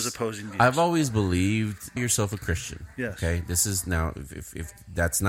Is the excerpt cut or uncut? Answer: cut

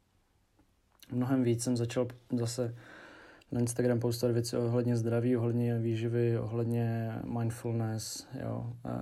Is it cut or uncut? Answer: uncut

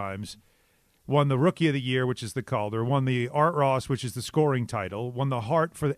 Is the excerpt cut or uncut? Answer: uncut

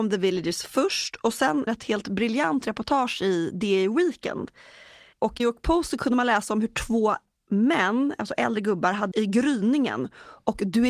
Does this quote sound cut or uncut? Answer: cut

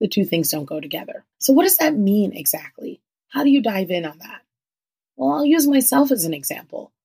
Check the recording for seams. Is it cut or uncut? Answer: cut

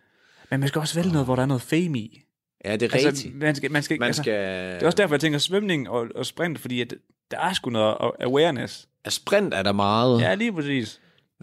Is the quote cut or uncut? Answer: uncut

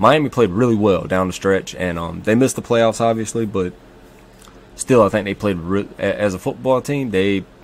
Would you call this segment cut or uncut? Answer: uncut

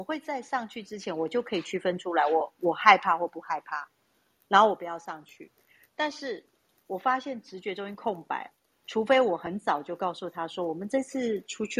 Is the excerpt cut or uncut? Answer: uncut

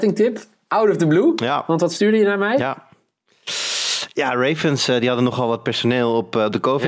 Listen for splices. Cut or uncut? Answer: uncut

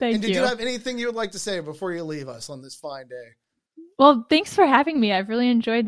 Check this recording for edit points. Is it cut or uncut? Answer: cut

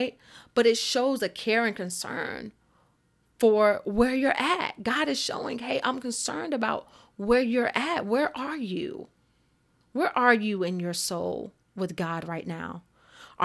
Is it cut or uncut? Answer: uncut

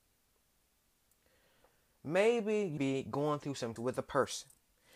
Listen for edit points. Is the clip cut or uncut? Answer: cut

